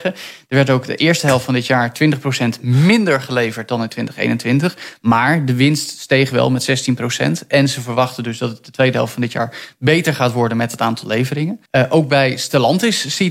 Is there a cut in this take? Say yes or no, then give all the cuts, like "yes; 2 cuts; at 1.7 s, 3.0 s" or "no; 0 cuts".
yes; 1 cut; at 11.7 s